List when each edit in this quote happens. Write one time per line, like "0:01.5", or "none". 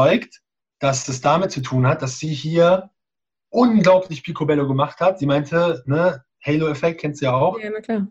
none

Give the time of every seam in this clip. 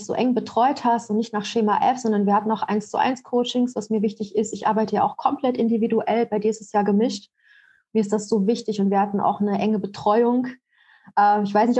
none

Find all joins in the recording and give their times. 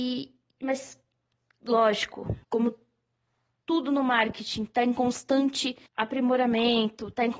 0:02.4
0:05.9

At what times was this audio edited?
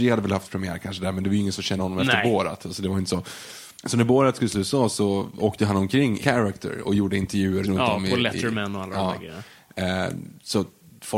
0:01.8
0:03.8
0:04.5
0:06.2
0:07.6

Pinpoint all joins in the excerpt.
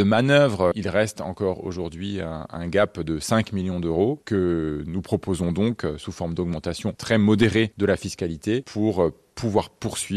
none

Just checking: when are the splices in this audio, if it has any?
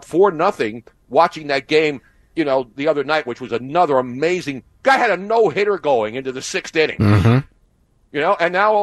none

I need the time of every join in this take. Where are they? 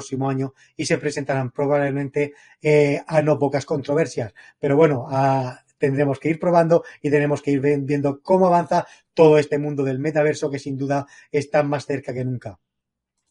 none

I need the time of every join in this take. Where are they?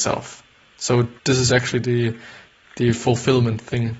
0:01.2
0:01.5

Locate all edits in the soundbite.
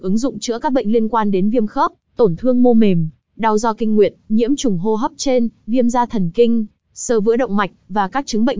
none

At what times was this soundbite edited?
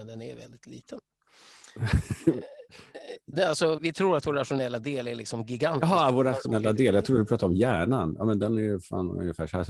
0:03.3
0:03.8

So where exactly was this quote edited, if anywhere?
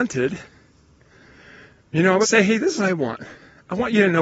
0:02.2
0:02.8

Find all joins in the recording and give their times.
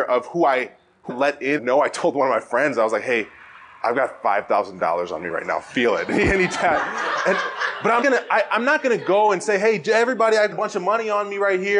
0:01.1
0:01.6
0:08.0
0:10.5

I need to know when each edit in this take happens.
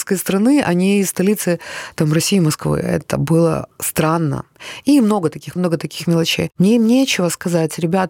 0:05.6
0:06.5

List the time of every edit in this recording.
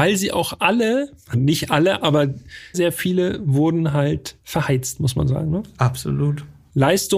0:01.3
0:02.7
0:04.4

